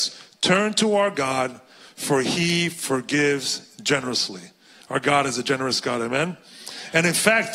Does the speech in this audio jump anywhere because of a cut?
no; 0 cuts

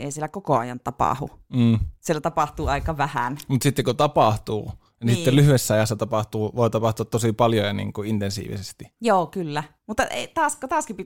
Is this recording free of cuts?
no; 3 cuts; at 2.0 s, 9.0 s, 9.8 s

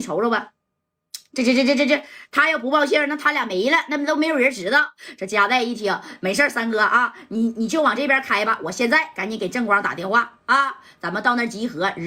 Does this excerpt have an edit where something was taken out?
no; 0 cuts

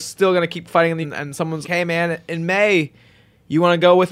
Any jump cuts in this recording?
yes; 2 cuts; at 1.0 s, 1.6 s

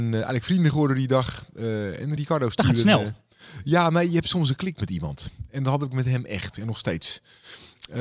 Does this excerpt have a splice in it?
no; 0 cuts

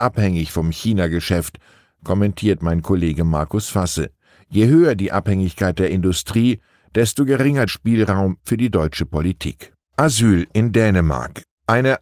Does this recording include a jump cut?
yes; 2 cuts; at 7.7 s, 9.8 s

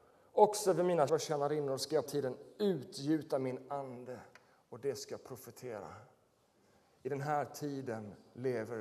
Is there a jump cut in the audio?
yes; 2 cuts; at 1.1 s, 2.1 s

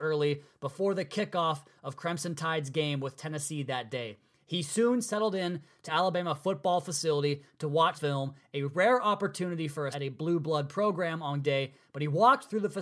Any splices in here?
yes; 4 cuts; at 5.9 s, 7.9 s, 9.9 s, 11.4 s

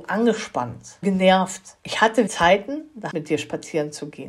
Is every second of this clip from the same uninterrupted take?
no; 4 cuts; at 1.0 s, 1.8 s, 2.3 s, 3.1 s

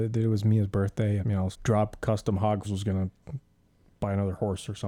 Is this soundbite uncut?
no; 3 cuts; at 1.2 s, 1.5 s, 2.6 s

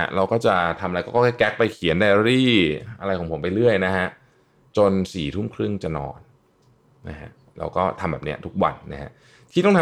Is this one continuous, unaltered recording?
yes; 0 cuts

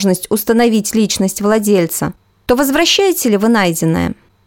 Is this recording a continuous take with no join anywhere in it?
yes; 0 cuts

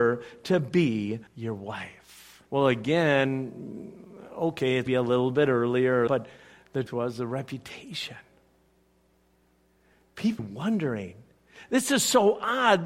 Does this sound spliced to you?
yes; 6 cuts; at 1.3 s, 2.5 s, 4.9 s, 6.1 s, 6.9 s, 10.4 s

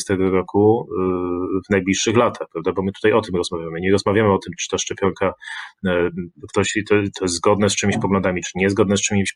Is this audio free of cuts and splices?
yes; 0 cuts

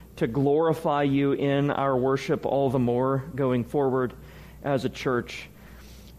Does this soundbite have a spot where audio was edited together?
no; 0 cuts

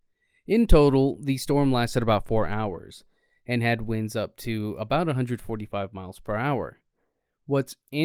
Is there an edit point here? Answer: no; 0 cuts

